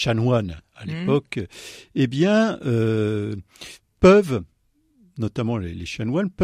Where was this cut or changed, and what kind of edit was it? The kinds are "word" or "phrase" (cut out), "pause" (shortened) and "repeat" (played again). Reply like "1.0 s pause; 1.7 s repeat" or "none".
none